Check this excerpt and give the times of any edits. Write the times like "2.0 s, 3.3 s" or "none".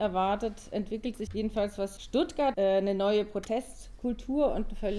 1.3 s, 2.0 s, 2.5 s

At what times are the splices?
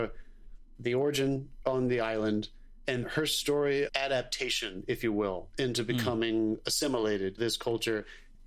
3.0 s, 3.9 s, 7.4 s

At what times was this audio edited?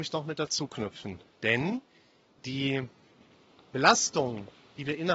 none

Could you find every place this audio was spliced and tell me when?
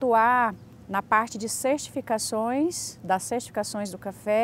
none

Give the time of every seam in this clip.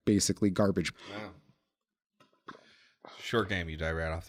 0.9 s

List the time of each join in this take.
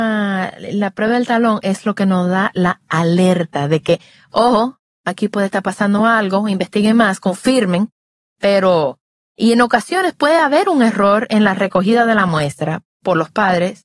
none

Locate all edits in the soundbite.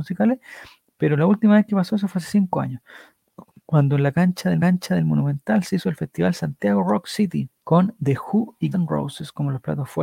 4.6 s, 7.6 s, 8.7 s

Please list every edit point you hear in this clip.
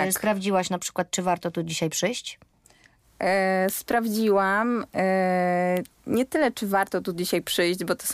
none

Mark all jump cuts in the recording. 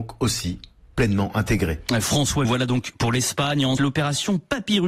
2.4 s, 3.8 s

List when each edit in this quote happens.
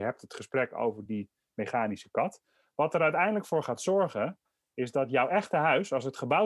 none

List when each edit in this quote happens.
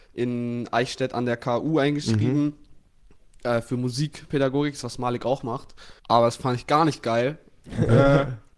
6.0 s

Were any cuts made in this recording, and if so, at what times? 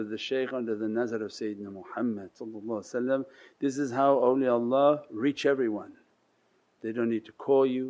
none

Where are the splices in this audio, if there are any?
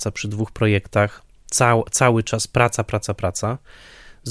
none

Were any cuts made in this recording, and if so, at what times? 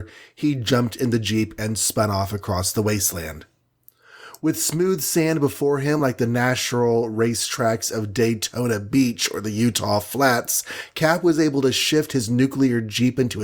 none

